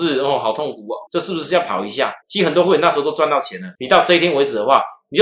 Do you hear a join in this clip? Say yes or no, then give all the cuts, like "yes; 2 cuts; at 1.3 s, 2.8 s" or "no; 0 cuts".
yes; 3 cuts; at 1.1 s, 2.2 s, 3.7 s